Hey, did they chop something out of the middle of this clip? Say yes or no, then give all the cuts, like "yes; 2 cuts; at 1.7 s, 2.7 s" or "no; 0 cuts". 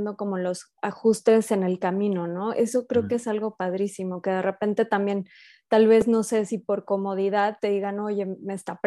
no; 0 cuts